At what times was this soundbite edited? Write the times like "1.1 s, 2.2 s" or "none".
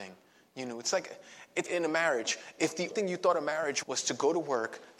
1.7 s, 2.9 s, 3.8 s